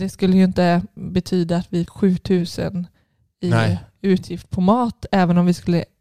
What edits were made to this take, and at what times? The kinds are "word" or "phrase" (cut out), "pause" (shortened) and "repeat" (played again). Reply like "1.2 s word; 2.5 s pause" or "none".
1.0 s word; 1.9 s word